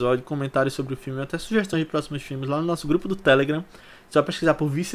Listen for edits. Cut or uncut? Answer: uncut